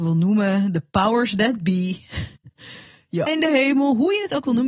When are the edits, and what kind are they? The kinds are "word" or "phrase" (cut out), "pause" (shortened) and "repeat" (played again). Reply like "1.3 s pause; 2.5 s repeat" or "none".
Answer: 2.4 s pause; 3.3 s word